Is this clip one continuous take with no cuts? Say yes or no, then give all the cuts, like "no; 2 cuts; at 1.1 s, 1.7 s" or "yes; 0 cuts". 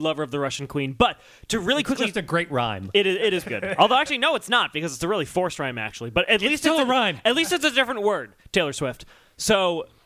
no; 1 cut; at 3.5 s